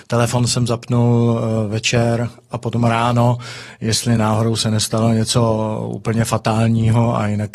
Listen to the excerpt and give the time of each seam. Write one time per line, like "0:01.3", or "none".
none